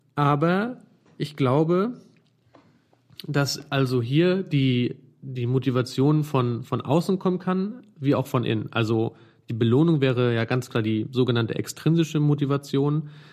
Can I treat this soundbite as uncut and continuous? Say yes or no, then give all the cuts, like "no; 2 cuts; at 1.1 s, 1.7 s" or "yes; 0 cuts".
yes; 0 cuts